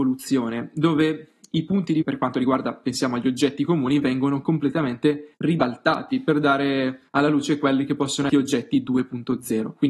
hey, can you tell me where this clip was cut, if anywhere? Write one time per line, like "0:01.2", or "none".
0:02.0
0:05.3
0:07.1
0:08.3